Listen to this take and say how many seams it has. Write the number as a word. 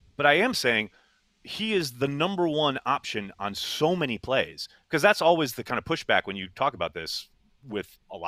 zero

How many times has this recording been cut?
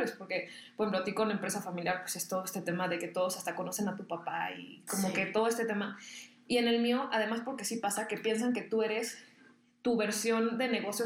zero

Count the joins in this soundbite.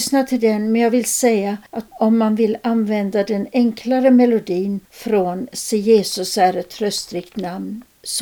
two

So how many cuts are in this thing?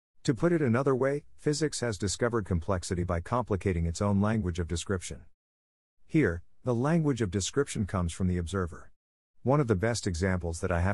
zero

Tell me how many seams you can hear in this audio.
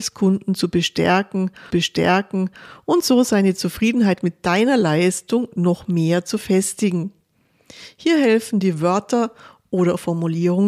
one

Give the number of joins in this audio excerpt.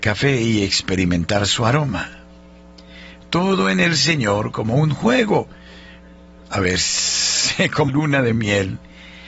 one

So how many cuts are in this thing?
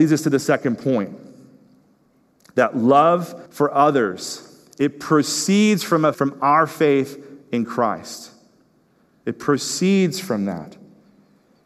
two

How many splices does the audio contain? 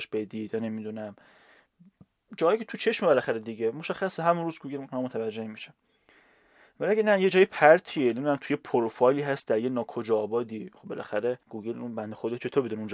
one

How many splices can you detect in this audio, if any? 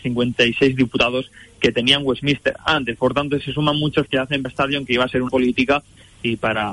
three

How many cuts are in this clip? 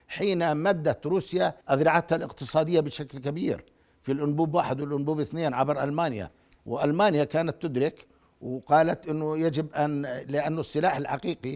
one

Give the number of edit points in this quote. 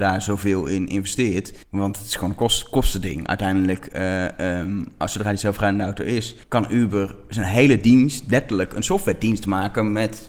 two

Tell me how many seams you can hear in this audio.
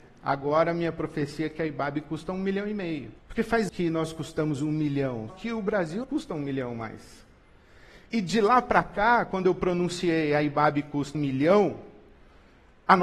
six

